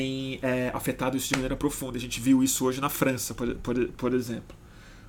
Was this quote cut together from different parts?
no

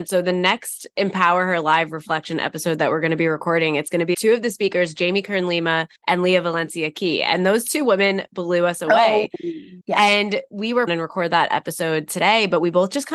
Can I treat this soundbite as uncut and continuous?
no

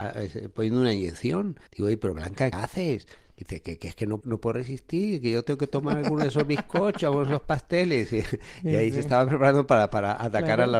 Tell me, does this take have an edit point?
yes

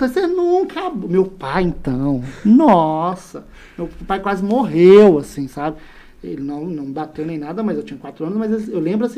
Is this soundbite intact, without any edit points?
yes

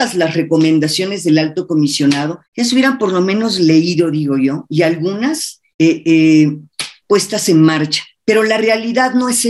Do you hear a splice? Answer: yes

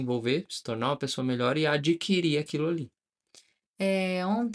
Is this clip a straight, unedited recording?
yes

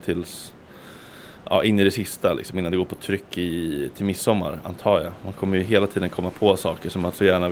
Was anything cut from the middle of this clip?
no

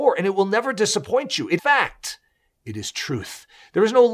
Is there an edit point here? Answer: yes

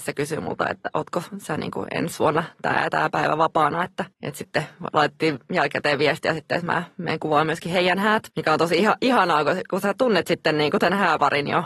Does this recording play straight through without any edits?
no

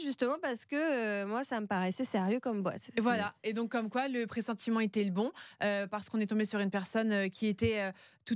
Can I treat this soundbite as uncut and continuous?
yes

